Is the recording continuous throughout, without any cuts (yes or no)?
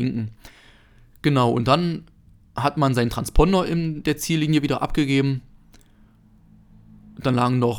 yes